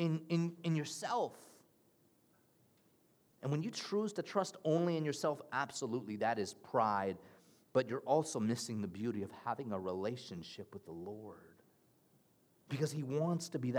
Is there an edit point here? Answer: no; 0 cuts

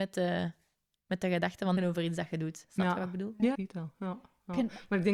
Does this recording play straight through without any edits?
no; 2 cuts; at 1.8 s, 3.5 s

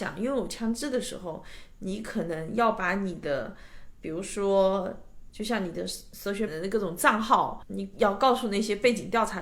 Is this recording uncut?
no; 1 cut; at 6.5 s

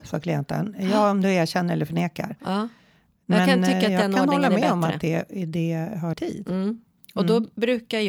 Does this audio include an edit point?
yes; 1 cut; at 6.1 s

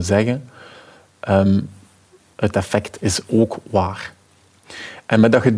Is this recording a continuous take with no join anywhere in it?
yes; 0 cuts

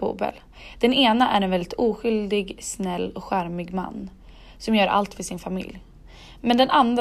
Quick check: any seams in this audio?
no; 0 cuts

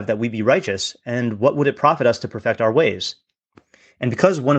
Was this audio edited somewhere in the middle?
no; 0 cuts

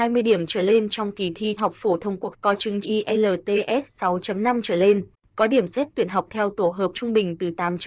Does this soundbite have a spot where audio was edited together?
yes; 5 cuts; at 1.6 s, 2.3 s, 2.8 s, 6.3 s, 6.9 s

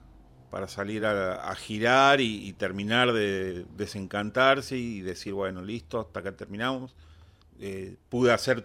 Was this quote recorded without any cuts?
yes; 0 cuts

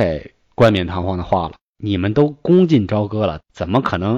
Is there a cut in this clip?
no; 0 cuts

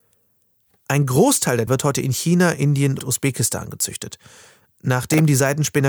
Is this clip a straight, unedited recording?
no; 2 cuts; at 1.7 s, 3.0 s

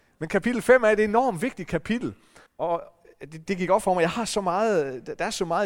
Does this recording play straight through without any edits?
no; 1 cut; at 2.5 s

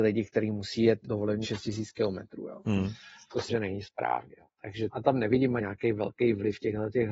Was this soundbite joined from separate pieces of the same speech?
yes; 5 cuts; at 1.0 s, 1.4 s, 3.5 s, 4.9 s, 5.6 s

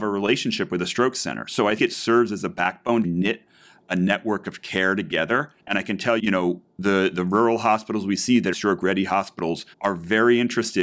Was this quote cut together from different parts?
yes; 6 cuts; at 1.8 s, 3.0 s, 5.6 s, 6.2 s, 8.5 s, 9.7 s

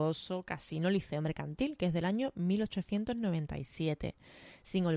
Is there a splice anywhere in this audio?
no; 0 cuts

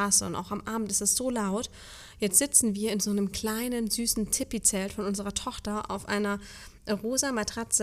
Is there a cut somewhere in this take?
no; 0 cuts

